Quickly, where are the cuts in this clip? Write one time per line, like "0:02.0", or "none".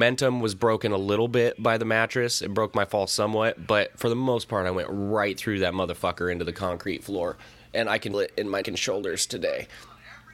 0:08.1
0:08.6